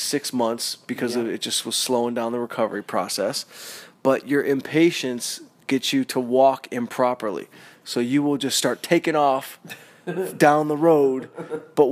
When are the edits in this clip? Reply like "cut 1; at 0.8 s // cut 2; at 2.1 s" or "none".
none